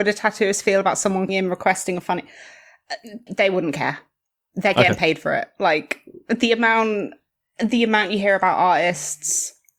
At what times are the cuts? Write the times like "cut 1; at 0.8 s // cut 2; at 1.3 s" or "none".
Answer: cut 1; at 1.3 s // cut 2; at 3.3 s